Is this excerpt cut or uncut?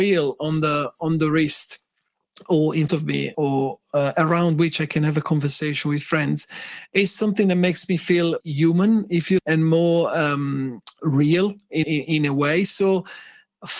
cut